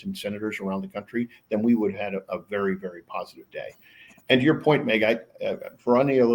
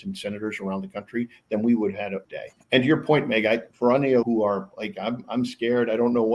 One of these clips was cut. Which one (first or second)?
second